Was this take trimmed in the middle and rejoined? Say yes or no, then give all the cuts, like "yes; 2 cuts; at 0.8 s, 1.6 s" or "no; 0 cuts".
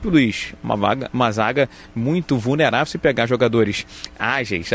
no; 0 cuts